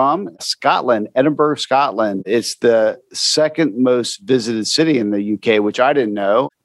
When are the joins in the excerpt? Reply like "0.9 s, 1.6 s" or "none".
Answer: none